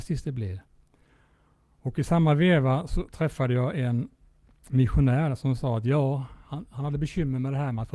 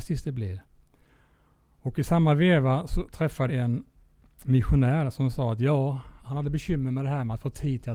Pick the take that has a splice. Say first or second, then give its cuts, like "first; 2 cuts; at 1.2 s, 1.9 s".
second; 2 cuts; at 3.5 s, 6.2 s